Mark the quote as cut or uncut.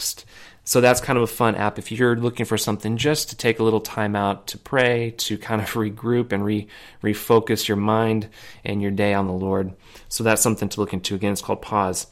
uncut